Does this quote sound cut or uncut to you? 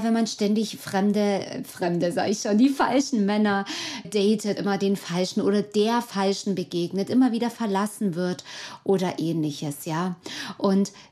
cut